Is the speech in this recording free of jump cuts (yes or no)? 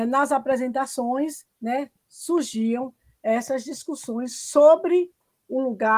yes